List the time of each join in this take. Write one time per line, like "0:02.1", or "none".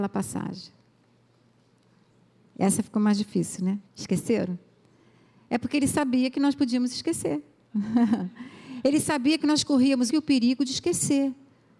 0:03.9
0:10.1